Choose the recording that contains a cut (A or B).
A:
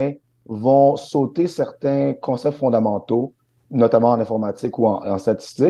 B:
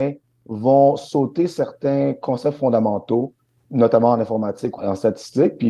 B